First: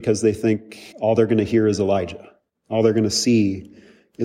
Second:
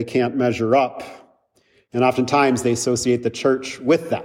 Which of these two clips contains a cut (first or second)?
first